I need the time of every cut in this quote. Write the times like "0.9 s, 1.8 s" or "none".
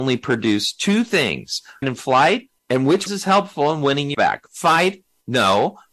1.8 s, 2.6 s, 3.1 s, 4.1 s